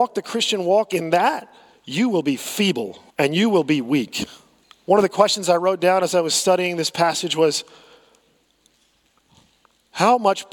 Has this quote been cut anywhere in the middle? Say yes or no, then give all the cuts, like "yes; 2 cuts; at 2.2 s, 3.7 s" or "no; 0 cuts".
yes; 3 cuts; at 1.7 s, 3.1 s, 4.6 s